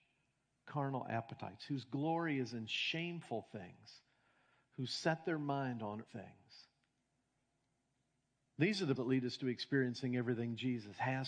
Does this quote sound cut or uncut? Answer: cut